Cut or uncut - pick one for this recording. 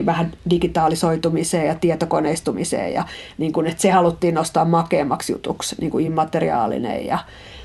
uncut